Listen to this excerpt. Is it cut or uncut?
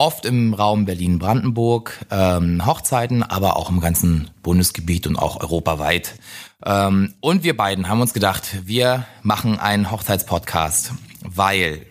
uncut